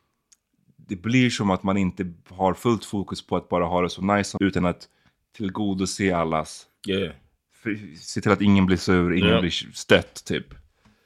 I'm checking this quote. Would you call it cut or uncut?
cut